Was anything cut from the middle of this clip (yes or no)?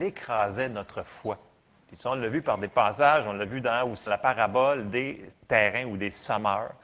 yes